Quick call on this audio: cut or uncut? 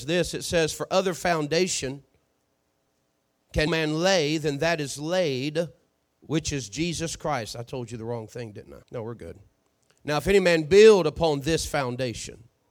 cut